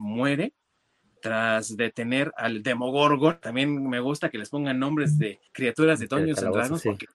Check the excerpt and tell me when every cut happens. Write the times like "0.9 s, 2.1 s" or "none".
5.5 s